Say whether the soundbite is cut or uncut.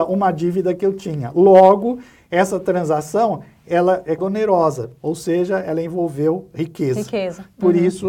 cut